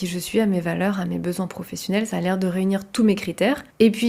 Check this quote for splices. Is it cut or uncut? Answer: uncut